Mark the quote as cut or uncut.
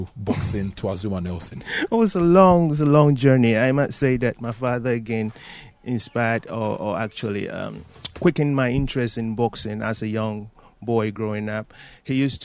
uncut